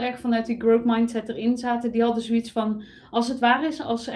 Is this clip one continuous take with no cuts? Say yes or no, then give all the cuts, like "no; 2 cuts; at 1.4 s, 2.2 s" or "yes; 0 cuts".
yes; 0 cuts